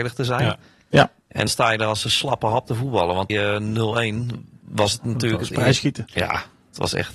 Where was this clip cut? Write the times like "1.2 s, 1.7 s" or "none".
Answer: 1.5 s, 3.3 s